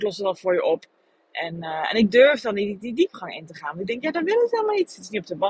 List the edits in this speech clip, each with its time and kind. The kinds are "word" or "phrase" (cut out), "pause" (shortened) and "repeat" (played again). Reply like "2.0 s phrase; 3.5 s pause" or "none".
none